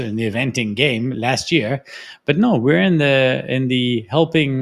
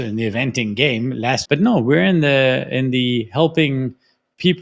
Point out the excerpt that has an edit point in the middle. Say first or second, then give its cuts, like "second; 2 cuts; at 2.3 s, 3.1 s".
second; 1 cut; at 1.4 s